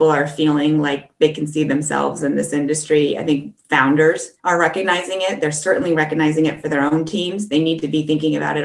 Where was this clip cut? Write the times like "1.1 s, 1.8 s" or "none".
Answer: 4.4 s

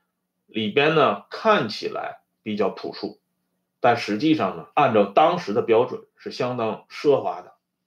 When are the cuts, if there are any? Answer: 4.7 s

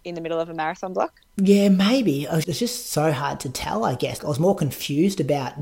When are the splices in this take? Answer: 1.2 s, 2.4 s, 4.2 s

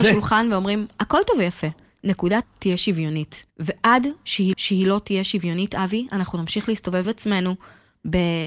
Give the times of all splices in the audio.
2.4 s, 3.5 s, 4.5 s, 7.0 s

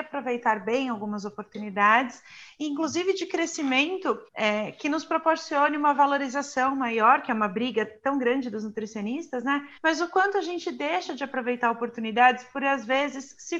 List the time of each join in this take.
4.3 s, 9.8 s

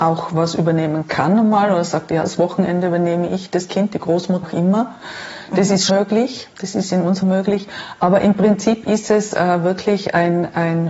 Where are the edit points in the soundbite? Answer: 4.4 s, 5.9 s, 6.5 s, 7.2 s

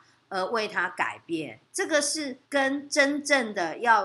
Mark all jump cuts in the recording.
1.7 s, 2.4 s

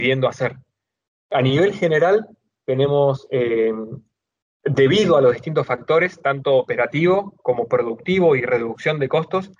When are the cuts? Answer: none

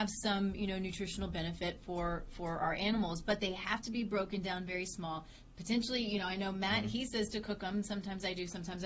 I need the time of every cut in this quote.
none

